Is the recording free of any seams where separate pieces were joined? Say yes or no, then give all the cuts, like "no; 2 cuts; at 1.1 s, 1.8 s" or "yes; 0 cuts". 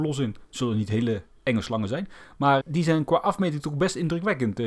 no; 1 cut; at 2.6 s